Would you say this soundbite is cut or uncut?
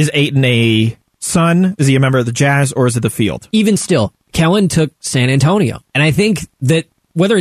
cut